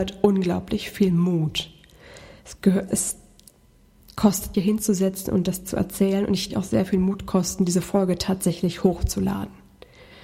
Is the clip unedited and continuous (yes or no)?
no